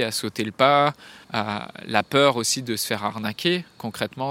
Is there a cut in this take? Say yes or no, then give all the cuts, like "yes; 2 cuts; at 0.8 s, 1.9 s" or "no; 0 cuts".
yes; 1 cut; at 1.2 s